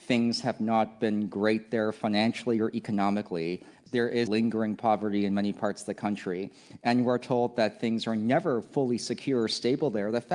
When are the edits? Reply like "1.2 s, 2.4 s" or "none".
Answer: 4.3 s

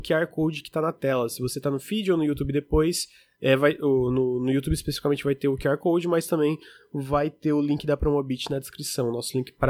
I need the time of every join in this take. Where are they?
none

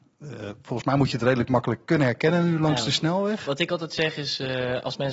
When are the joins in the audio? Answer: 1.8 s

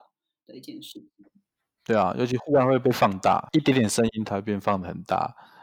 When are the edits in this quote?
none

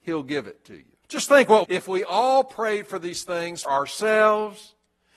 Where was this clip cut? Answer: 1.0 s, 1.6 s, 3.6 s

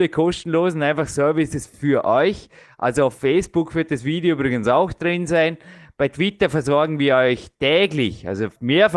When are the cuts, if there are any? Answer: none

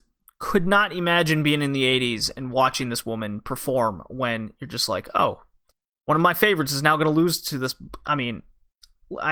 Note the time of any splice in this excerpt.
none

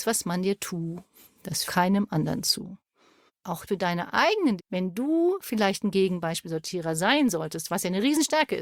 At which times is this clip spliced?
1.7 s, 3.7 s, 4.6 s

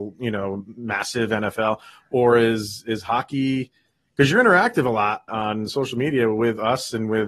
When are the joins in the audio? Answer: 5.3 s

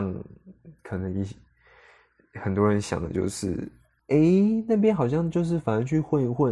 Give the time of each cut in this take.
none

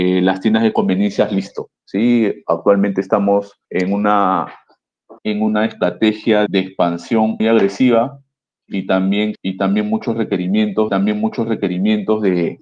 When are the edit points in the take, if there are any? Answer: 1.8 s, 3.6 s, 5.2 s, 6.5 s, 7.4 s, 9.3 s, 10.9 s

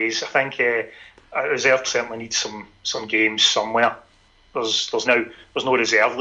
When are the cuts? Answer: 1.8 s, 2.8 s, 5.0 s

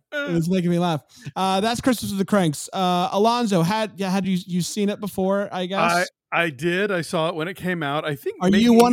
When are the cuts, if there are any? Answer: none

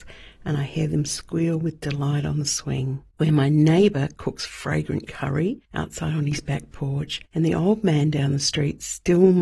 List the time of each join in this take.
3.1 s, 5.7 s, 7.3 s

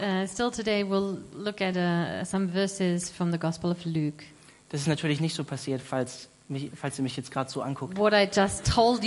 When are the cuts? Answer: none

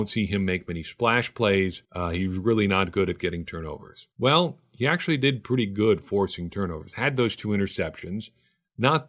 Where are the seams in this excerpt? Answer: 1.8 s, 4.1 s

